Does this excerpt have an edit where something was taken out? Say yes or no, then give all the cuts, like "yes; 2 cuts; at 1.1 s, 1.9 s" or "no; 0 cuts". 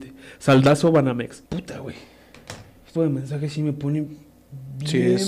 yes; 2 cuts; at 1.5 s, 3.0 s